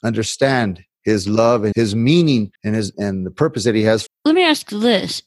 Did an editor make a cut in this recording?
yes; 4 cuts; at 1.7 s, 2.6 s, 2.9 s, 4.1 s

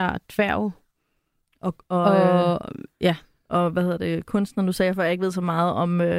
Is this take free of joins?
yes; 0 cuts

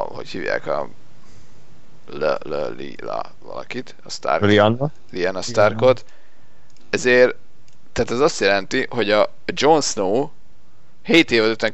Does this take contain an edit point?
no; 0 cuts

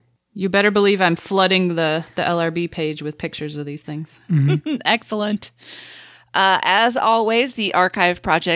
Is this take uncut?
yes; 0 cuts

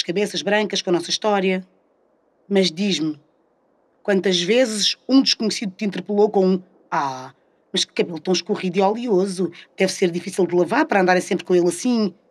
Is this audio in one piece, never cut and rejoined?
yes; 0 cuts

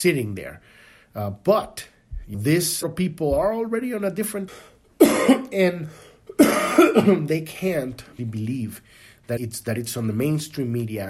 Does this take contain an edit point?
yes; 5 cuts; at 2.3 s, 2.8 s, 4.5 s, 8.2 s, 9.4 s

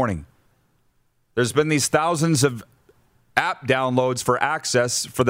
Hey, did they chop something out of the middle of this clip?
no; 0 cuts

